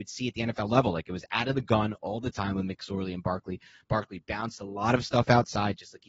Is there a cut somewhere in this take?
no; 0 cuts

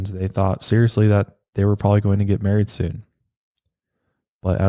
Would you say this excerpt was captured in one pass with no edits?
yes; 0 cuts

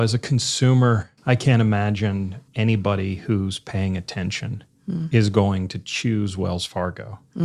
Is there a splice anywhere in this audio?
yes; 2 cuts; at 1.2 s, 2.5 s

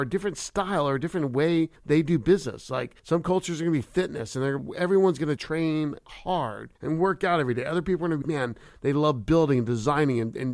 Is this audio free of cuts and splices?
no; 6 cuts; at 1.8 s, 3.0 s, 4.6 s, 5.4 s, 6.8 s, 8.2 s

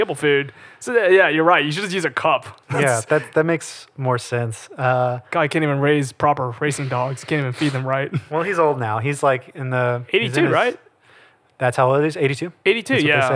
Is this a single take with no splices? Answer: yes; 0 cuts

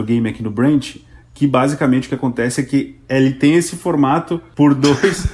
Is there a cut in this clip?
no; 0 cuts

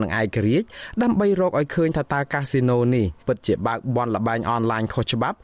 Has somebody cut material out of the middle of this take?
yes; 1 cut; at 3.2 s

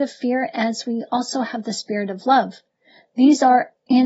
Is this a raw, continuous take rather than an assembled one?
yes; 0 cuts

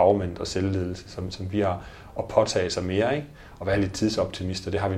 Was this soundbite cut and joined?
no; 0 cuts

